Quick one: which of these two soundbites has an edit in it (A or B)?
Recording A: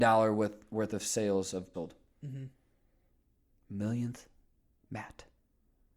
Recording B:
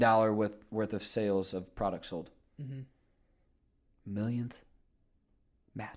A